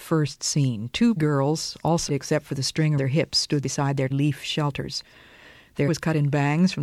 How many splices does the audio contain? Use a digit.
6